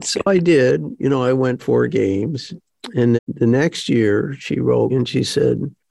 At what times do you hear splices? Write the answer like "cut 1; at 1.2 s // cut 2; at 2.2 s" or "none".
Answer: cut 1; at 1.6 s // cut 2; at 3.1 s // cut 3; at 4.9 s